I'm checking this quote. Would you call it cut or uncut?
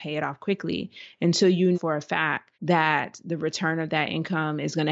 cut